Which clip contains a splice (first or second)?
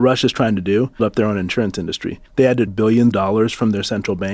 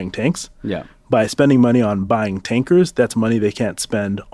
first